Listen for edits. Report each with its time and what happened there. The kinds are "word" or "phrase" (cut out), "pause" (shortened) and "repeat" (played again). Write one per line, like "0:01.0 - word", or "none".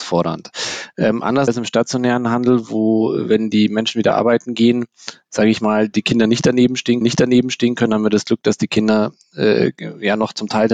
0:01.5 - word
0:05.9 - word
0:07.0 - repeat